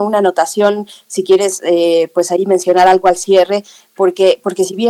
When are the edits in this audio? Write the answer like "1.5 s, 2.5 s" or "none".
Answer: none